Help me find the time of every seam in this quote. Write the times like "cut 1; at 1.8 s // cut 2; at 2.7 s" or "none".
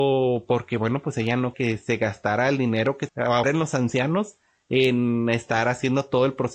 cut 1; at 1.5 s // cut 2; at 3.1 s // cut 3; at 3.4 s